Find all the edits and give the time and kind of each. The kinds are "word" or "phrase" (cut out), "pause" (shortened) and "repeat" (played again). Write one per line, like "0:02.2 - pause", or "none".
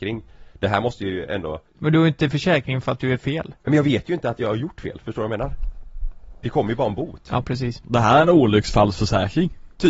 0:01.7 - pause
0:03.6 - pause